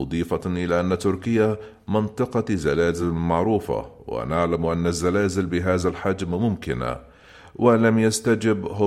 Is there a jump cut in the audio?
no; 0 cuts

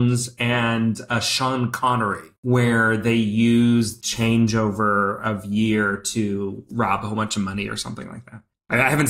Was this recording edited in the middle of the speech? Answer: yes; 2 cuts; at 2.4 s, 4.0 s

